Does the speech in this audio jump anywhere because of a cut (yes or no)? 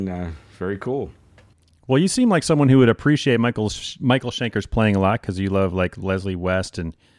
no